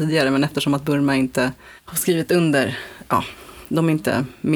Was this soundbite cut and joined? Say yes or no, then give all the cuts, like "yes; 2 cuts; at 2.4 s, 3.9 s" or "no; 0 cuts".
yes; 2 cuts; at 1.8 s, 3.1 s